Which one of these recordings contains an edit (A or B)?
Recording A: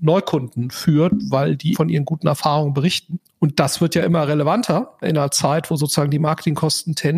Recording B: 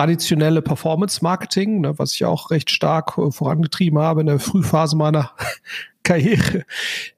A